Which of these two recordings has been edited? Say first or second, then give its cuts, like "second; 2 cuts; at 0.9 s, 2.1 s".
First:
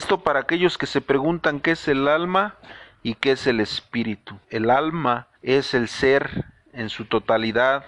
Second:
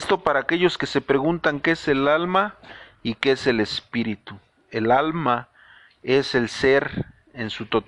first; 2 cuts; at 4.4 s, 5.4 s